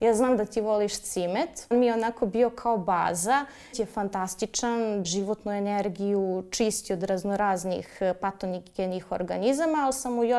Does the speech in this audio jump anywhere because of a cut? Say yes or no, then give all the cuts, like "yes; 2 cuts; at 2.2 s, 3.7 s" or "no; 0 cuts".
yes; 3 cuts; at 1.7 s, 3.7 s, 5.0 s